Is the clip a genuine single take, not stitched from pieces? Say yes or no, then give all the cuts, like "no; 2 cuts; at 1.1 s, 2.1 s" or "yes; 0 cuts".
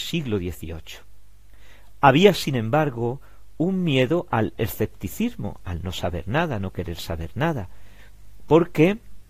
yes; 0 cuts